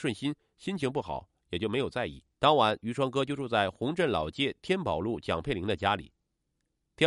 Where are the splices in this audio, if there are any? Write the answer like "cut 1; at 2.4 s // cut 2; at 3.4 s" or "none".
cut 1; at 2.3 s